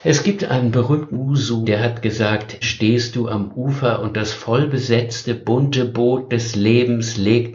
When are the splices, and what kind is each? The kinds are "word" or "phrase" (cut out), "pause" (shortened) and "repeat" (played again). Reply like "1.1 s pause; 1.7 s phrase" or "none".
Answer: 1.1 s phrase; 1.6 s word; 2.6 s word